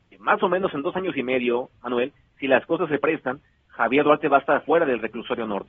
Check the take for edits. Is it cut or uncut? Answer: uncut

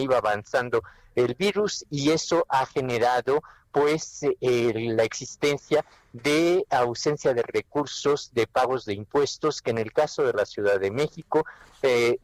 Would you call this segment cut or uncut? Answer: uncut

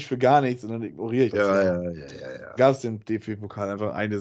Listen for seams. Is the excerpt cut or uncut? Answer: cut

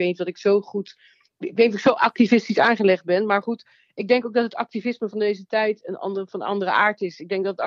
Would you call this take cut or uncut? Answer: uncut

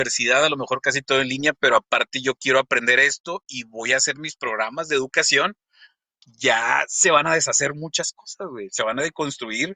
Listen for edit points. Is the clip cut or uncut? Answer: uncut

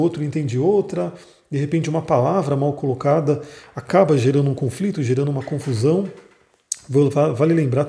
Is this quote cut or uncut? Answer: uncut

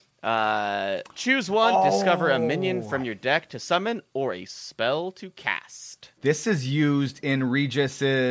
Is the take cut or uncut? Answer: cut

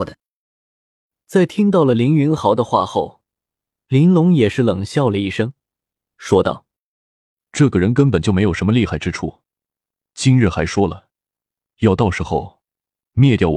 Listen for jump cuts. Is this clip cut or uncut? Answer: uncut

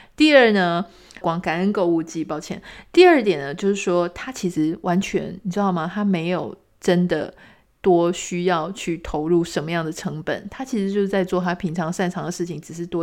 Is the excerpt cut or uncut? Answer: cut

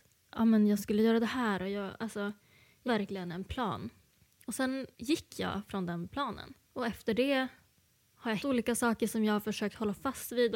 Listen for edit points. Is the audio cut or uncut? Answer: cut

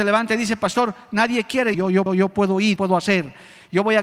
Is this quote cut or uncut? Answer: cut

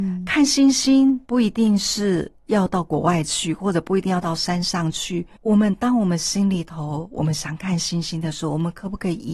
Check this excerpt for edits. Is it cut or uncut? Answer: cut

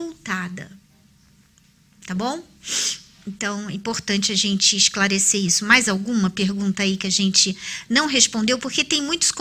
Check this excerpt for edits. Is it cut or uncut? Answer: uncut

